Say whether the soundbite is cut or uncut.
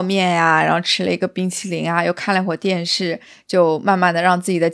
uncut